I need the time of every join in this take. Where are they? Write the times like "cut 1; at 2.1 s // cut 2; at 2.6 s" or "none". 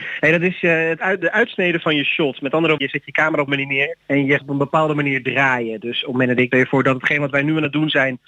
cut 1; at 2.8 s // cut 2; at 3.5 s // cut 3; at 4.0 s // cut 4; at 4.4 s // cut 5; at 6.5 s